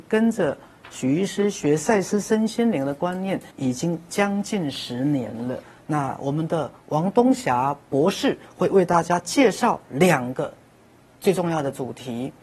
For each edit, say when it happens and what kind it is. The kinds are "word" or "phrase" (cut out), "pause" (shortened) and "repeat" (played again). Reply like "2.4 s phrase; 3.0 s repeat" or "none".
3.5 s pause